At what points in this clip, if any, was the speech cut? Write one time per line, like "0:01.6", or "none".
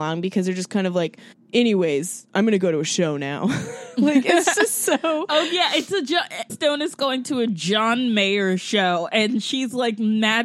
0:01.3
0:06.5

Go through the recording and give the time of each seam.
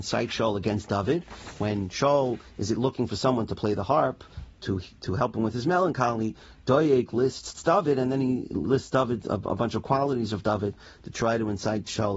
0:04.5

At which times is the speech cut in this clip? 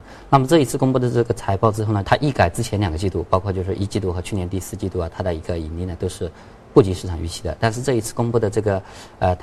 0:02.0

